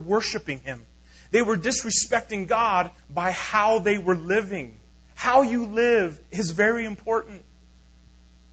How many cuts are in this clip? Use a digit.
3